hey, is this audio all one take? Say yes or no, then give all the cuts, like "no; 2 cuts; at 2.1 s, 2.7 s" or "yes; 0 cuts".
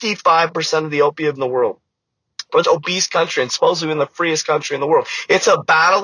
no; 2 cuts; at 1.3 s, 2.6 s